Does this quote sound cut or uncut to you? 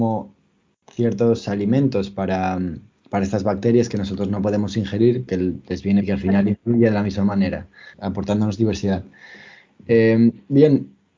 cut